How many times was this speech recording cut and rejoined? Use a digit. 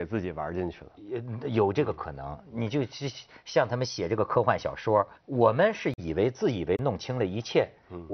1